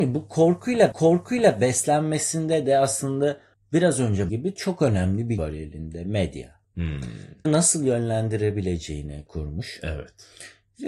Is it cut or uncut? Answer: cut